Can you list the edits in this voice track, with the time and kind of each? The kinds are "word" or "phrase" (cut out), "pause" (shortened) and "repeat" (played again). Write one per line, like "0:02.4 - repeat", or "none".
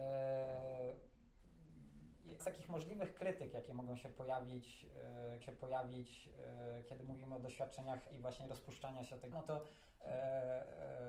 0:02.4 - word
0:05.4 - repeat
0:08.1 - word
0:09.3 - word